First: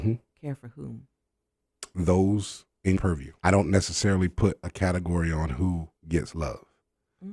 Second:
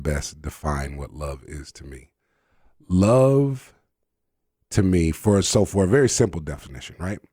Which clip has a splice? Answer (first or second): first